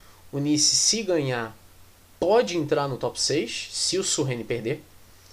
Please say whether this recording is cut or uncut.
uncut